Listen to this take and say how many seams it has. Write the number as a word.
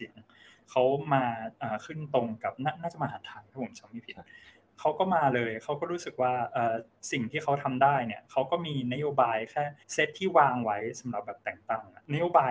two